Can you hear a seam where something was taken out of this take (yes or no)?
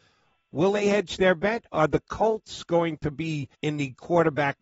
yes